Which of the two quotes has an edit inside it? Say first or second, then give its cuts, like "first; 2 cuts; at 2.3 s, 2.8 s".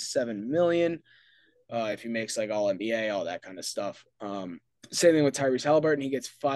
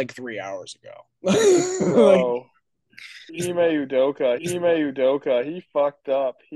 second; 2 cuts; at 3.3 s, 4.4 s